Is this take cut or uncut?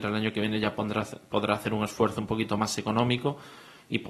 uncut